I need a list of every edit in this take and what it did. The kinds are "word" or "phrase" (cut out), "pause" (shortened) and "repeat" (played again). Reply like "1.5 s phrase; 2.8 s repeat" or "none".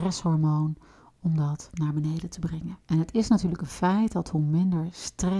2.8 s pause